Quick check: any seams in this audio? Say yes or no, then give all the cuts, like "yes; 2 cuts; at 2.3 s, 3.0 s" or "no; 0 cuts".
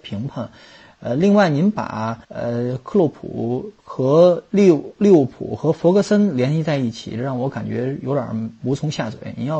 yes; 2 cuts; at 2.2 s, 3.8 s